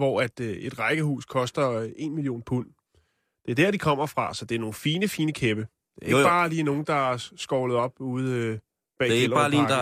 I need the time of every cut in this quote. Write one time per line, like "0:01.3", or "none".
none